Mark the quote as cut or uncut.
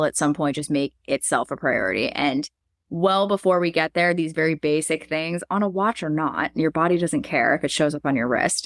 cut